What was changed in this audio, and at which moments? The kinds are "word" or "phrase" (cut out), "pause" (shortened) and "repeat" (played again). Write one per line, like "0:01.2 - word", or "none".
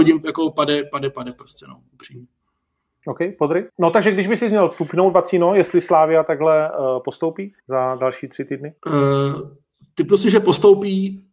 0:03.7 - pause
0:07.6 - pause
0:08.8 - pause

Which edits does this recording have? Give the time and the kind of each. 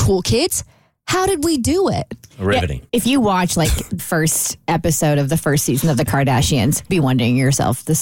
0:02.9 - pause
0:04.0 - word
0:06.9 - word

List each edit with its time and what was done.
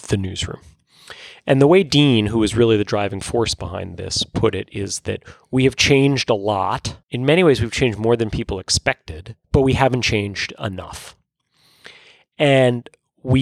0:07.0 - pause
0:09.4 - pause

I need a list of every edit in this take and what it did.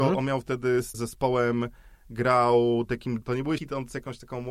0:00.9 - word
0:03.2 - word
0:03.6 - word

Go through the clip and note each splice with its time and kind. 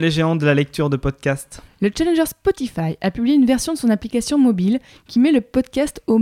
none

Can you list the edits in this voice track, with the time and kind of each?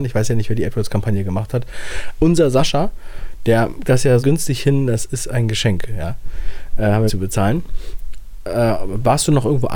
0:03.8 - word
0:04.2 - word
0:07.1 - phrase

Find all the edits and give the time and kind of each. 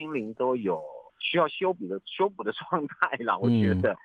0:01.1 - pause

